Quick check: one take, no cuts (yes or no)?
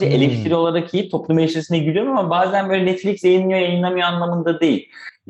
yes